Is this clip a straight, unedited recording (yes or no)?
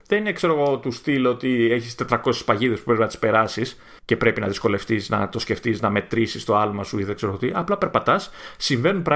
no